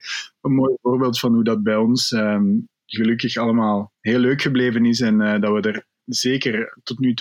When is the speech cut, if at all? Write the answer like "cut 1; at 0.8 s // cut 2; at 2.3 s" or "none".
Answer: cut 1; at 3.9 s